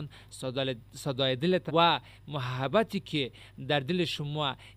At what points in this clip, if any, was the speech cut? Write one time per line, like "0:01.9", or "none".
0:01.7